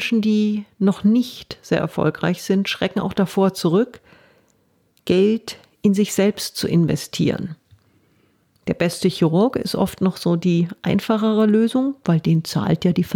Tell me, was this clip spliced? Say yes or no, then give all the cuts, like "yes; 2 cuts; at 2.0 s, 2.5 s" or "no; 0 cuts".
no; 0 cuts